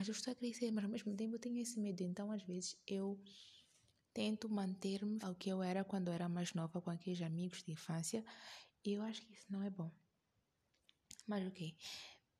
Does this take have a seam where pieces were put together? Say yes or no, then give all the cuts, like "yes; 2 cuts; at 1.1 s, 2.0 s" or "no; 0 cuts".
yes; 1 cut; at 5.2 s